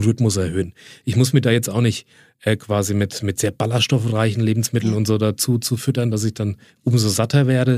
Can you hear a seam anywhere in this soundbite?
no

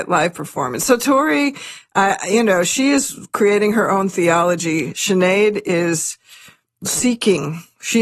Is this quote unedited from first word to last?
yes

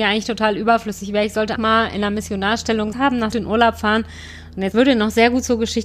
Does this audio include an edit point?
yes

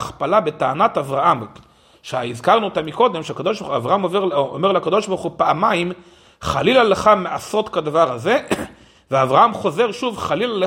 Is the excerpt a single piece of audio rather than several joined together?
yes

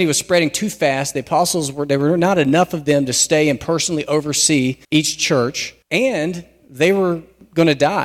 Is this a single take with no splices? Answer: no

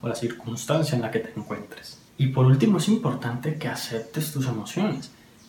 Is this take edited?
no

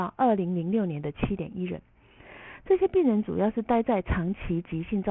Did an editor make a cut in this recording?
no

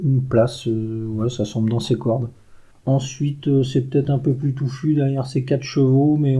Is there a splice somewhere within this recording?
yes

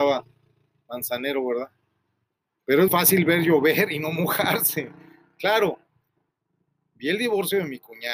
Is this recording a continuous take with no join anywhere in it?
no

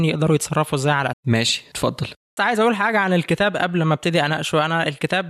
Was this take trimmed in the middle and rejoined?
yes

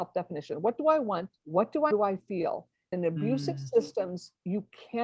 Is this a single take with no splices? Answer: no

